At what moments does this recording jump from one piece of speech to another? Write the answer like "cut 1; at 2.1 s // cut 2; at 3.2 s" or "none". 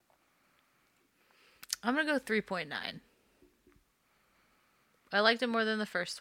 none